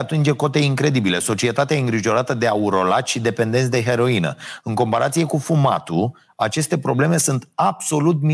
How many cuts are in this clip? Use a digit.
0